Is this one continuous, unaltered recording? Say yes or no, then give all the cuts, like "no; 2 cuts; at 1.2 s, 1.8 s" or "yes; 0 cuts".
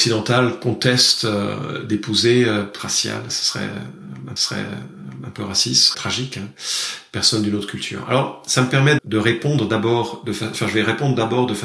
no; 4 cuts; at 2.8 s, 4.4 s, 5.9 s, 9.0 s